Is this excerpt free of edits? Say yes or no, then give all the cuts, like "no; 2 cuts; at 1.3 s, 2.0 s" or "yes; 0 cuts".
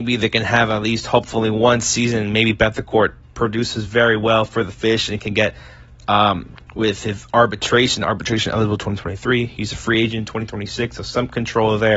yes; 0 cuts